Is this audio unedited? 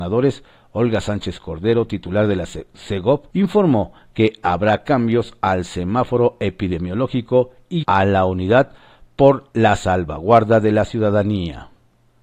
no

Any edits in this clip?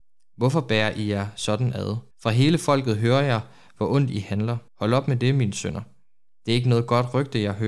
yes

